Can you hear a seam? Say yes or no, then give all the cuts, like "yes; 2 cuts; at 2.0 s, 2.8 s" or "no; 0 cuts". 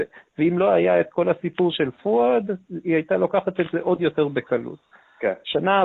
no; 0 cuts